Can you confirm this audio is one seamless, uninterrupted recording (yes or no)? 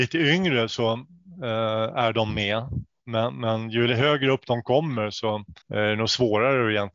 no